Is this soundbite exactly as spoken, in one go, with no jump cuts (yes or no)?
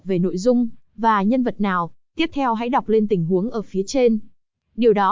yes